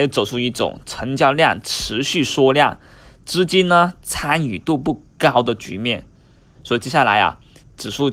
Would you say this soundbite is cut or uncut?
uncut